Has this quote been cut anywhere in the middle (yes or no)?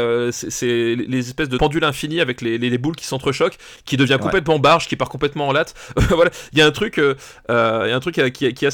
no